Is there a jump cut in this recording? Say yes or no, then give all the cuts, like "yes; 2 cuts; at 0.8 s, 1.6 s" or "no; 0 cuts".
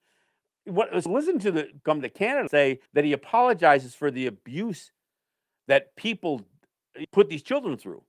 yes; 5 cuts; at 1.1 s, 1.8 s, 2.5 s, 2.9 s, 7.0 s